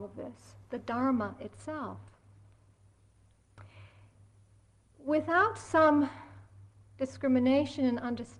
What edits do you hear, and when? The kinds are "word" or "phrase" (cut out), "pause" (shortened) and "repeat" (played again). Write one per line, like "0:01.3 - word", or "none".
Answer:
none